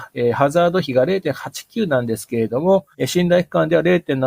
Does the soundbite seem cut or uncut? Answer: cut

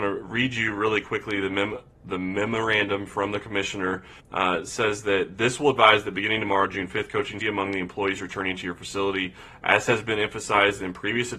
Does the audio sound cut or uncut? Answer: cut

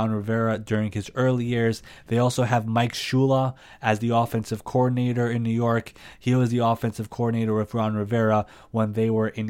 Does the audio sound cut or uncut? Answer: uncut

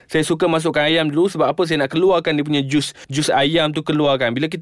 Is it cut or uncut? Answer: uncut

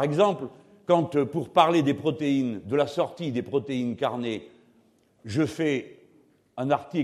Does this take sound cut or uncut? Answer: uncut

